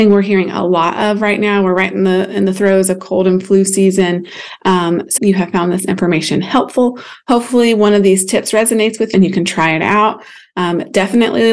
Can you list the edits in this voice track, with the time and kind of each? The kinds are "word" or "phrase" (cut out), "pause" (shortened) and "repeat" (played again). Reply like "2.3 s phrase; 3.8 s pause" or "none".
5.2 s word; 9.1 s word